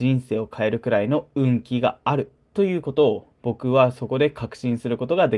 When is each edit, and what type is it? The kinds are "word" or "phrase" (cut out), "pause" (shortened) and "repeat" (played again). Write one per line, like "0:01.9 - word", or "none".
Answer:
0:03.3 - pause